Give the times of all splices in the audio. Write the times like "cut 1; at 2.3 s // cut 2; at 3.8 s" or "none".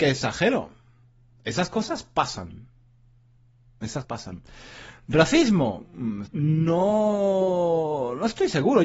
cut 1; at 4.0 s // cut 2; at 6.3 s